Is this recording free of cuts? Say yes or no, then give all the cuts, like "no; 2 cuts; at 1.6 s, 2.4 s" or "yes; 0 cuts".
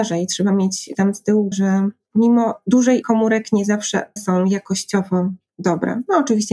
no; 4 cuts; at 0.9 s, 1.5 s, 3.0 s, 4.2 s